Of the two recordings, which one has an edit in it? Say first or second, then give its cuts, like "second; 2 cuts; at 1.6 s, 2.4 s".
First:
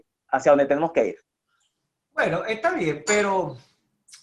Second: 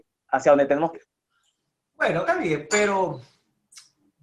second; 2 cuts; at 0.9 s, 2.3 s